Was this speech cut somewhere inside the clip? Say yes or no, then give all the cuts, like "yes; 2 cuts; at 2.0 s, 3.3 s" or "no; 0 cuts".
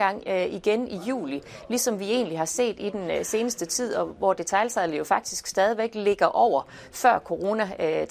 no; 0 cuts